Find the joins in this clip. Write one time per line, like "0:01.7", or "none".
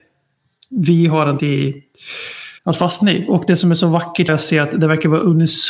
0:01.4
0:02.6
0:04.3